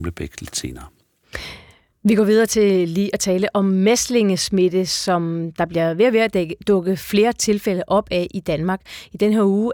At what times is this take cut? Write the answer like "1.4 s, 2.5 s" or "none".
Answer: none